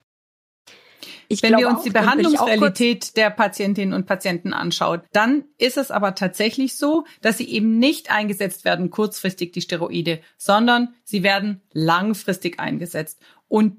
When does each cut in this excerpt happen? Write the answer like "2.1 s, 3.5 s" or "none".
5.1 s